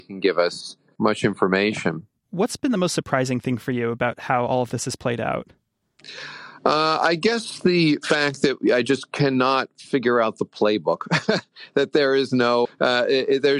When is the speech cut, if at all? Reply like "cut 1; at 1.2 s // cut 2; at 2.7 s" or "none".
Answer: cut 1; at 12.6 s